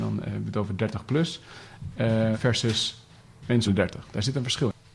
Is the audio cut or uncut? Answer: cut